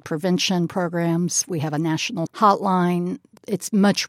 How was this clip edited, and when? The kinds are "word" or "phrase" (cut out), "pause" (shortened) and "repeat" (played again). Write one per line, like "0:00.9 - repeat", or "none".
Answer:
0:02.3 - word